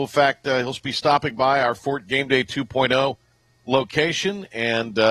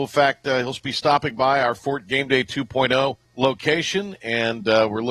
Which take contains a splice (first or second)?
second